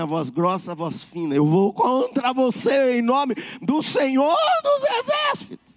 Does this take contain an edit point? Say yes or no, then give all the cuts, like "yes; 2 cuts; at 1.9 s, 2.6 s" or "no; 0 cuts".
no; 0 cuts